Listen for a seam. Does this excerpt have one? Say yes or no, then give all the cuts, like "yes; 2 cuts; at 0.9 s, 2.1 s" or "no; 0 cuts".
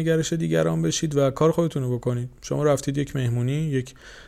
no; 0 cuts